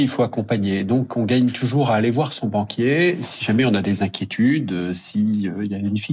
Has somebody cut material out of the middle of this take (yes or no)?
no